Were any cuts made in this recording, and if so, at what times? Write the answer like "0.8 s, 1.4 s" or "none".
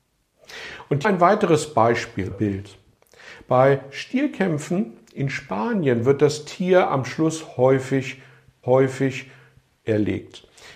1.0 s, 2.3 s, 8.6 s